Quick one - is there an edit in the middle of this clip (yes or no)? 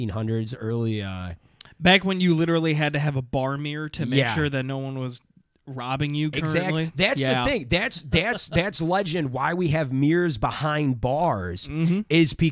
no